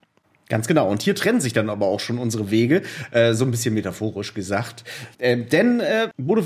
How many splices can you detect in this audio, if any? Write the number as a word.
one